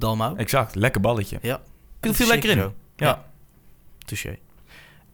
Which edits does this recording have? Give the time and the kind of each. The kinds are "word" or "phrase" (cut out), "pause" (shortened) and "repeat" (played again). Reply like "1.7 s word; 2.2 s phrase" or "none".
2.0 s word